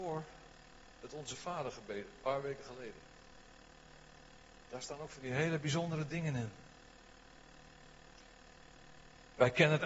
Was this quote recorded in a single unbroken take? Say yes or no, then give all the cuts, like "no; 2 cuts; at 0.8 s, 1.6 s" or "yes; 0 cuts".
yes; 0 cuts